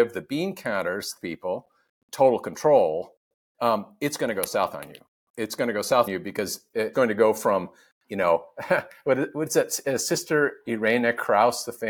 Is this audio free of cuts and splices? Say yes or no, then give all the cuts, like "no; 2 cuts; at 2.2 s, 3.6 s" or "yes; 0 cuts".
no; 4 cuts; at 1.2 s, 1.9 s, 6.1 s, 6.9 s